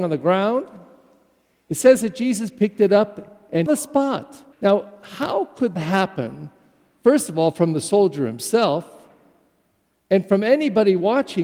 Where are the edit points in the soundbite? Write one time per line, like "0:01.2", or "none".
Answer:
0:03.7
0:04.5
0:05.8